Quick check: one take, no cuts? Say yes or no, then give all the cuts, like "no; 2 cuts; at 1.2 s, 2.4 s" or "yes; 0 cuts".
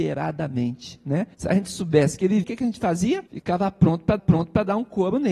no; 4 cuts; at 1.3 s, 2.4 s, 3.3 s, 4.2 s